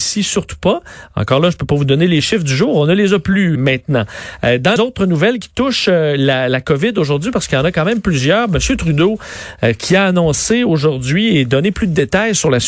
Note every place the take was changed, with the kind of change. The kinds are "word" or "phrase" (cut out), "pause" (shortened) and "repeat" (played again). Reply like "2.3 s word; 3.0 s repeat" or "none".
3.5 s word; 4.8 s word

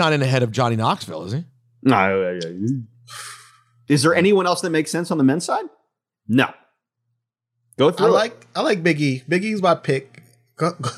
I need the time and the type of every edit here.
none

